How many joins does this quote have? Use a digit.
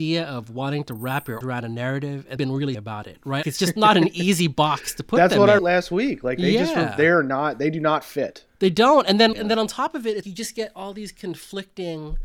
7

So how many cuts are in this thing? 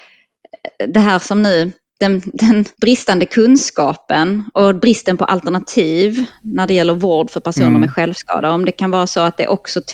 1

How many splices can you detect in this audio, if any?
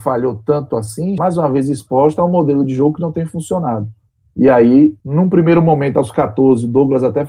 3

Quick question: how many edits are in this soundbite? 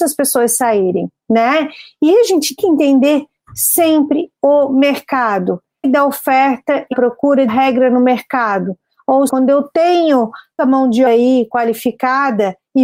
8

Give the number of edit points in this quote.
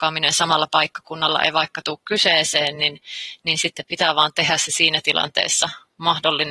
0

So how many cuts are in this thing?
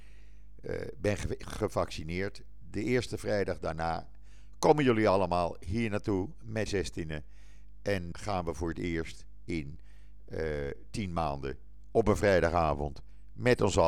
2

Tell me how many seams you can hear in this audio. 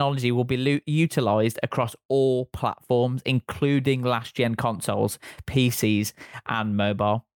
0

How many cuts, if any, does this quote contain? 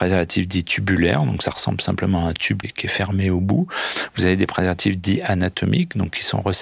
1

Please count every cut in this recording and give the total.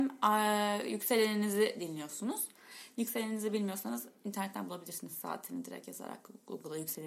0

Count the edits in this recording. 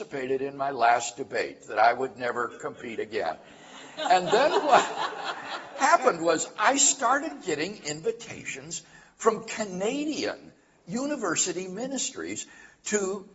0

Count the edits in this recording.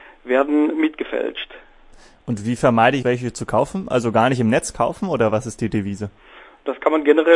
1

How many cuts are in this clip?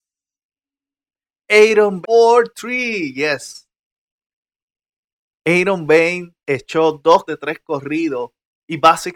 3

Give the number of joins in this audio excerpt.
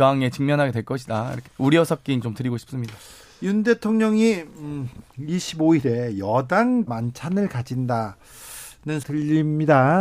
4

